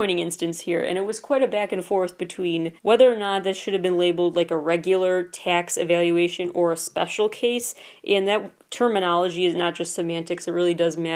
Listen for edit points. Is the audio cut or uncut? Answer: cut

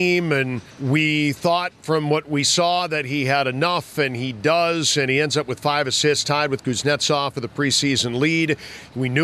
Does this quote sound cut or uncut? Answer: uncut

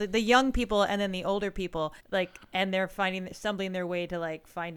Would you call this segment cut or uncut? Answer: cut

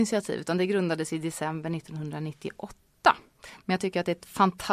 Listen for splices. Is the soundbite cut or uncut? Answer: uncut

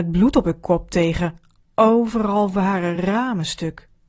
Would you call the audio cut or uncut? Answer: uncut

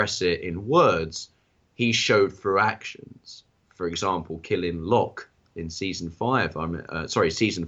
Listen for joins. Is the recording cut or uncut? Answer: cut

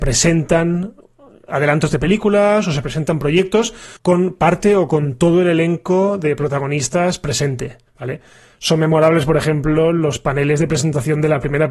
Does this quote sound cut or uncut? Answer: cut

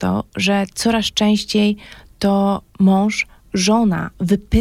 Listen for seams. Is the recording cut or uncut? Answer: uncut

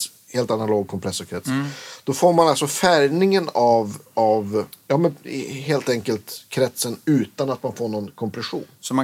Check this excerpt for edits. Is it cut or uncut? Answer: uncut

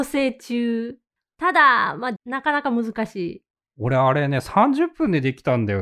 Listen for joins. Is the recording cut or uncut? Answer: cut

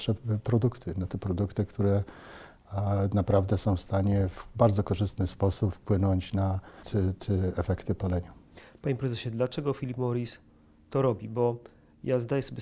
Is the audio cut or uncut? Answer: cut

